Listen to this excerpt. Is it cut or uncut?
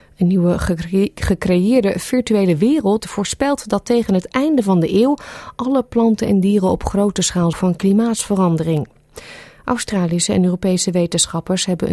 cut